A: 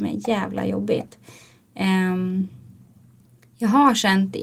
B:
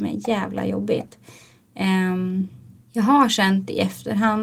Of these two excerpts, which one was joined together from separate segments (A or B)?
B